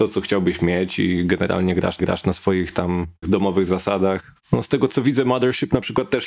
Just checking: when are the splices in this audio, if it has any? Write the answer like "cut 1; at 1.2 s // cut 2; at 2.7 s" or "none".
cut 1; at 2.0 s // cut 2; at 3.2 s

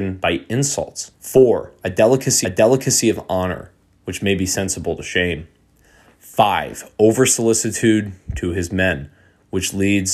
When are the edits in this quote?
cut 1; at 1.1 s // cut 2; at 2.4 s

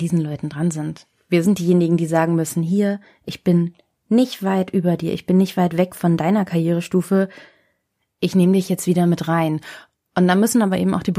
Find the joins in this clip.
none

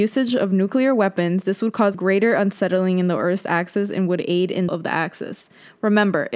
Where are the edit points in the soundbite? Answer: cut 1; at 1.9 s // cut 2; at 4.7 s

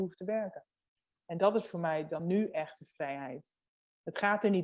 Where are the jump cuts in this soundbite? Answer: none

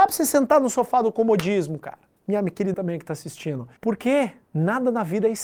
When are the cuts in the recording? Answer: cut 1; at 2.2 s // cut 2; at 2.7 s // cut 3; at 3.8 s

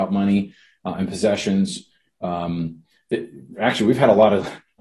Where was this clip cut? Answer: none

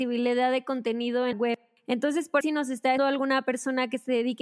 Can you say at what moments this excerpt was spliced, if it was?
cut 1; at 1.3 s // cut 2; at 2.4 s // cut 3; at 3.0 s

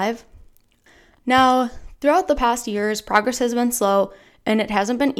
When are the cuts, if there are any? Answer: none

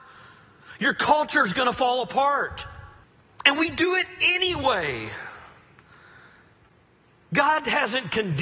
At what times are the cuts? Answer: cut 1; at 3.0 s

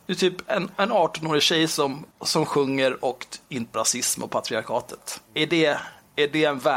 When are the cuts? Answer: cut 1; at 2.1 s // cut 2; at 3.7 s // cut 3; at 5.2 s

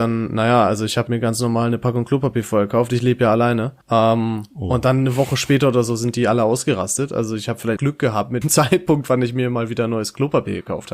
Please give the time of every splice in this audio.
cut 1; at 1.1 s // cut 2; at 3.8 s // cut 3; at 7.8 s // cut 4; at 8.4 s

